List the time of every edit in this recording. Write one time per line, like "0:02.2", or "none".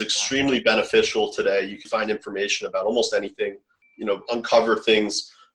0:01.8